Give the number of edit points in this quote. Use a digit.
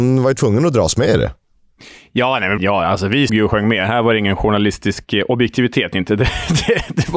2